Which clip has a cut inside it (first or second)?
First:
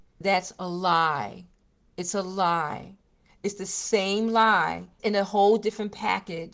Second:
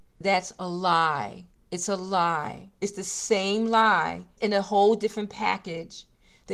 second